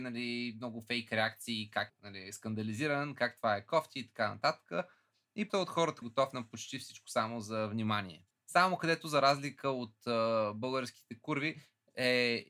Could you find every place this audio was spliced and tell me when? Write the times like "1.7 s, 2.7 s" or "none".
1.9 s, 5.5 s, 6.0 s, 8.3 s